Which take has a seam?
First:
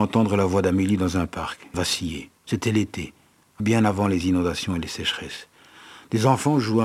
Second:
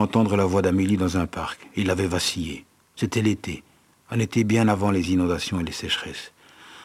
first; 3 cuts; at 1.7 s, 2.4 s, 3.6 s

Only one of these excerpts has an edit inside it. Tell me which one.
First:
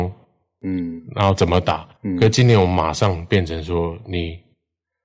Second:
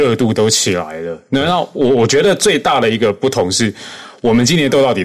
first; 1 cut; at 2.0 s

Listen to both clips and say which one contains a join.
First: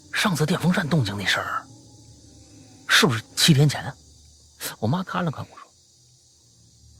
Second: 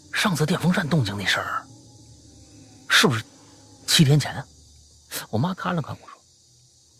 first; 1 cut; at 3.3 s

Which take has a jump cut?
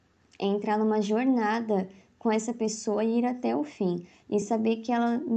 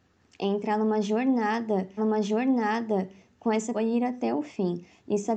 second; 2 cuts; at 2.0 s, 3.7 s

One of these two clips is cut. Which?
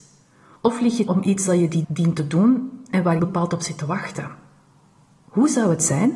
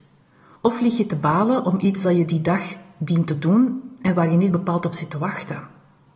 first; 3 cuts; at 1.1 s, 1.8 s, 3.2 s

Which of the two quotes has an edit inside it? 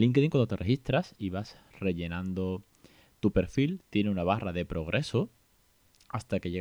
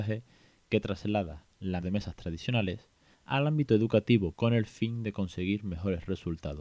second; 3 cuts; at 1.8 s, 3.1 s, 4.3 s

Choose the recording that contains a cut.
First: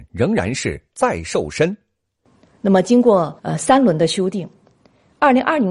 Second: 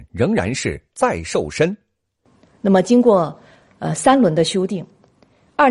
first; 1 cut; at 3.4 s

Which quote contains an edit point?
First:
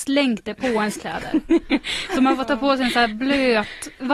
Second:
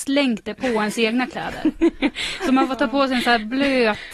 first; 1 cut; at 1.0 s

